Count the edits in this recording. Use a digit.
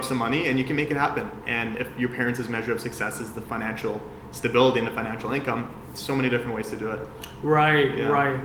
0